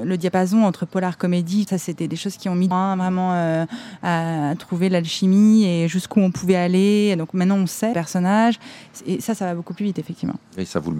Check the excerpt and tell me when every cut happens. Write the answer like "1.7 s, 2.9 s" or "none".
1.7 s, 2.7 s, 7.9 s